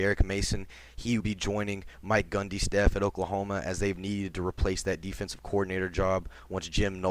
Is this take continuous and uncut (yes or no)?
no